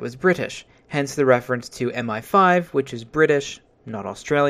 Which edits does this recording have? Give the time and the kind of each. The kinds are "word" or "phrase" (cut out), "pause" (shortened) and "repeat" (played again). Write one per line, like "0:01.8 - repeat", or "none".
none

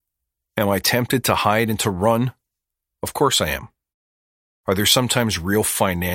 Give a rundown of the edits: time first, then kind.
none

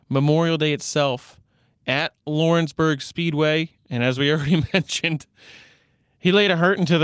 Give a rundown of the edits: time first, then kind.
none

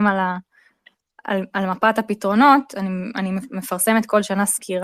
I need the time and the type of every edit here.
none

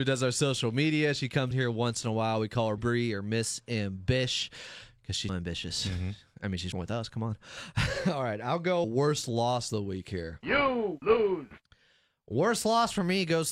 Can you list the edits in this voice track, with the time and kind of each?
0:01.5 - word
0:02.8 - word
0:05.3 - word
0:06.7 - word
0:08.8 - word

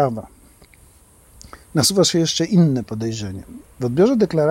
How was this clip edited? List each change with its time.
none

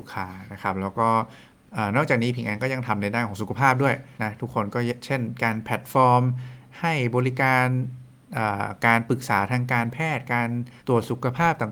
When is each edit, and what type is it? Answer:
0:04.2 - pause
0:10.8 - pause

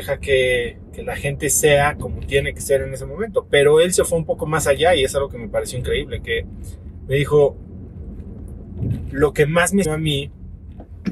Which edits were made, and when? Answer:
0:09.8 - word

